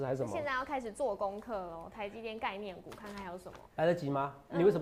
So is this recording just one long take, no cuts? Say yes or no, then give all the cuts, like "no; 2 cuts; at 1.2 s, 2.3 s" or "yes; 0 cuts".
no; 1 cut; at 3.7 s